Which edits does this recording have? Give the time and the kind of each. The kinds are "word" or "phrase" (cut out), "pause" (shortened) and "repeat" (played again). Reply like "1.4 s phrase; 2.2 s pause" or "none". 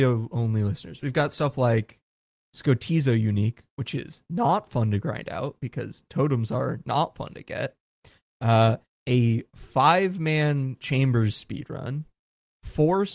none